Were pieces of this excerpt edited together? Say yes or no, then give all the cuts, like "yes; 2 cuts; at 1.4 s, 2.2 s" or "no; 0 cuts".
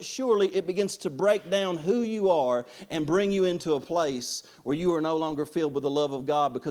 no; 0 cuts